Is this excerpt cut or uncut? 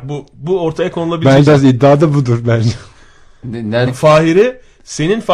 cut